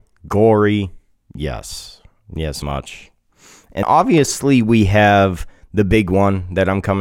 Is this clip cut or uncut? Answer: cut